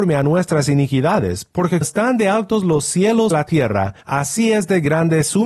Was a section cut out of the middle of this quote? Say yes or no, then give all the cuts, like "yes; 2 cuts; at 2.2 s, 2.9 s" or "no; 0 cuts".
yes; 3 cuts; at 1.8 s, 3.3 s, 4.0 s